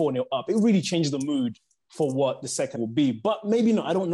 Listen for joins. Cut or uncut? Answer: cut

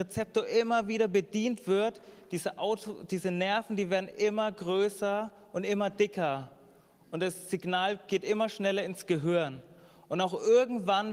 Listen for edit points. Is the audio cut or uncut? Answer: uncut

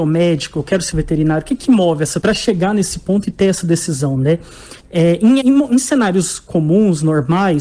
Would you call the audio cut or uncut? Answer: cut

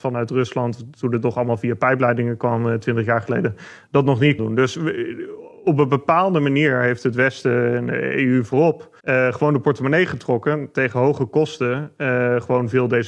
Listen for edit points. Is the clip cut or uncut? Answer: cut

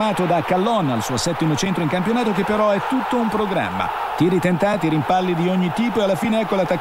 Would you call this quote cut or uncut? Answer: cut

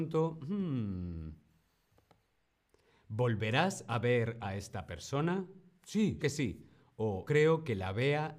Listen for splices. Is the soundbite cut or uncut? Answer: cut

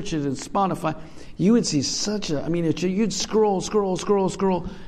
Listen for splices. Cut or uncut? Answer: uncut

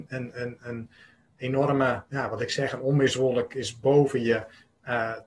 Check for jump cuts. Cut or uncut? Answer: uncut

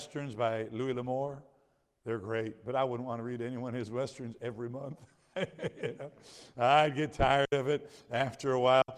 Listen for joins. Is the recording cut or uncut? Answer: uncut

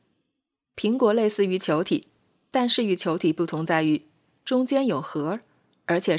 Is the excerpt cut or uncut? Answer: uncut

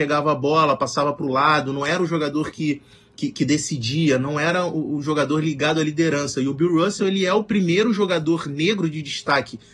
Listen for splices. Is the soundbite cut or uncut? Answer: uncut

